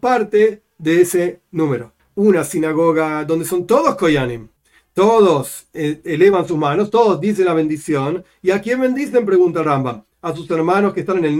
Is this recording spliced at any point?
no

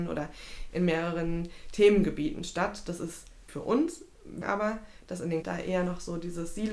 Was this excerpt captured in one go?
no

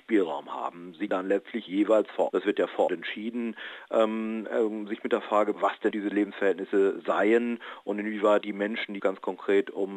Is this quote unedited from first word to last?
no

